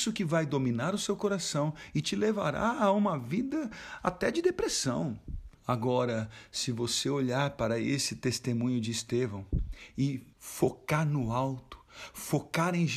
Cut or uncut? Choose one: cut